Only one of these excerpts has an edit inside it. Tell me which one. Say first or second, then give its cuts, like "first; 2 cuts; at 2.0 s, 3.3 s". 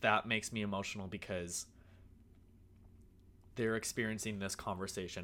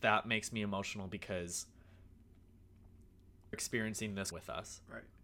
second; 2 cuts; at 3.5 s, 4.3 s